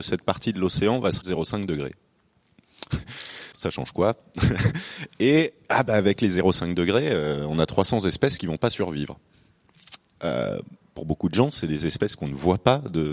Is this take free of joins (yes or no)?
no